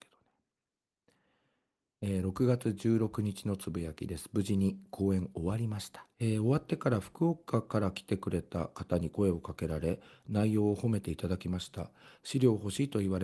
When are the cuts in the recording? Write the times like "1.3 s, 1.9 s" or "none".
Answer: 6.1 s